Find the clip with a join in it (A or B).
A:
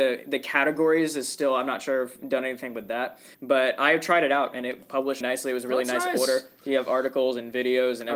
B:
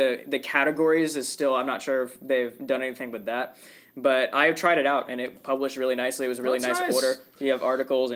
A